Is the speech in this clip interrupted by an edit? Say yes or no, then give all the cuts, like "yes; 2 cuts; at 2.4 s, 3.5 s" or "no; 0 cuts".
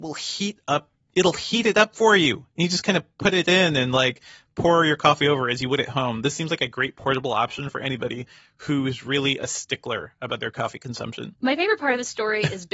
no; 0 cuts